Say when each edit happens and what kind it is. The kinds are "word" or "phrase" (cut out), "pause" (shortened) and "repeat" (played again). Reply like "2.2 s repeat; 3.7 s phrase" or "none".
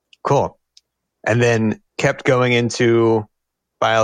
1.9 s pause

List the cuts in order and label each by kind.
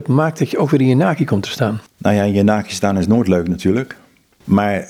1.9 s pause

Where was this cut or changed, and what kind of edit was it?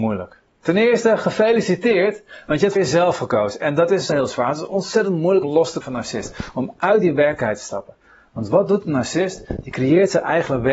2.8 s word; 4.1 s word; 5.4 s word; 5.8 s word

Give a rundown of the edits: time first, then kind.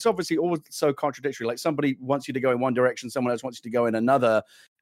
none

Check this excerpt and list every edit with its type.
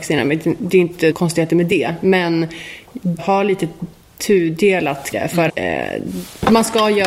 1.1 s word; 3.2 s word; 5.1 s word; 5.5 s word

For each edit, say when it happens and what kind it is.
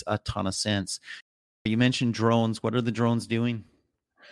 none

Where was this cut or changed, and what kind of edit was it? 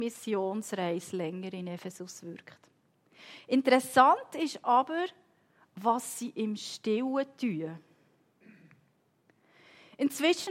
none

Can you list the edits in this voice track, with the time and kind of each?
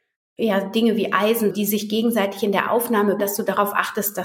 1.5 s phrase; 3.2 s word

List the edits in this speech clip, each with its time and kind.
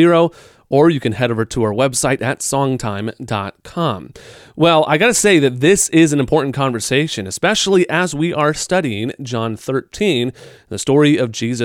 none

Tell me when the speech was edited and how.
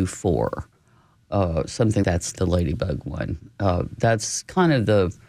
2.0 s word; 2.4 s word; 4.0 s word

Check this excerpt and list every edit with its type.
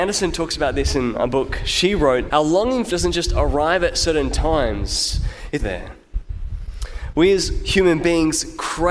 2.3 s word; 2.9 s word; 5.6 s word

